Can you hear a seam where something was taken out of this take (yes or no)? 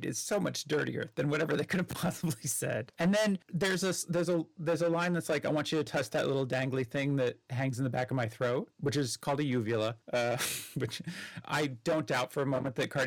yes